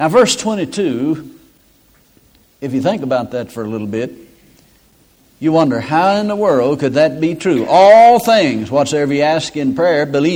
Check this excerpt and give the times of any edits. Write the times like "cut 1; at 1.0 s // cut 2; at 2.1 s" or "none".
none